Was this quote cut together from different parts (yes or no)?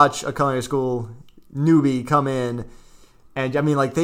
no